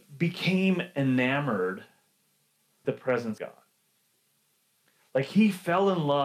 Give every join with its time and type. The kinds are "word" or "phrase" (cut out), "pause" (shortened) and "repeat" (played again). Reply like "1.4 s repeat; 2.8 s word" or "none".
2.8 s word; 3.4 s word